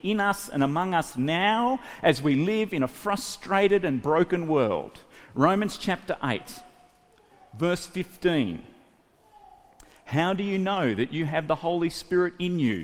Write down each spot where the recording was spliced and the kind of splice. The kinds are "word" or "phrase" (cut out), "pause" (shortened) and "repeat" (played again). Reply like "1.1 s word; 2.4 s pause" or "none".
none